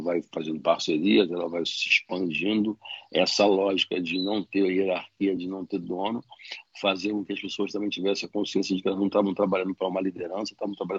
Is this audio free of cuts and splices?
yes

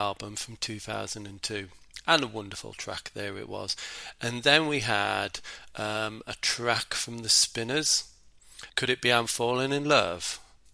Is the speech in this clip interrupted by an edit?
yes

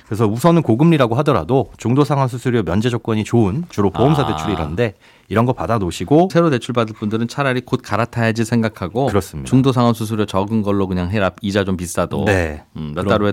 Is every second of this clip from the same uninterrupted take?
no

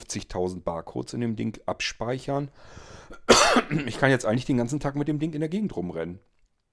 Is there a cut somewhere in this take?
no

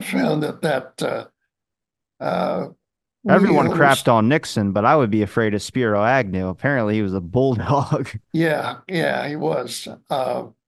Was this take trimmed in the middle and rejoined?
yes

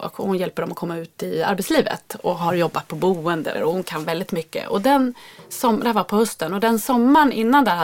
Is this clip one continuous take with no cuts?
no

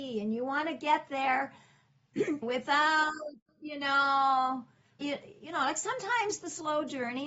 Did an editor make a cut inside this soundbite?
yes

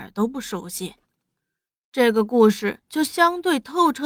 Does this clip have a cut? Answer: no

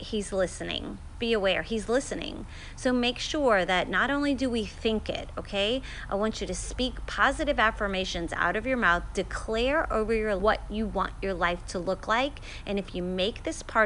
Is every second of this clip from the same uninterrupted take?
no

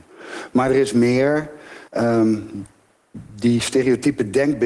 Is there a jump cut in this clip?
yes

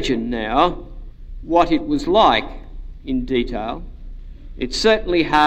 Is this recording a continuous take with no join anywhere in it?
yes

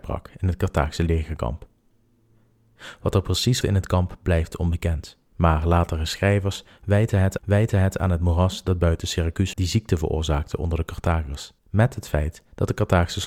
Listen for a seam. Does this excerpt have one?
yes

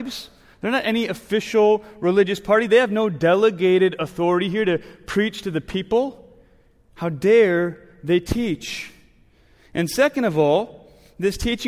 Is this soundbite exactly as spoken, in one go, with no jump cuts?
yes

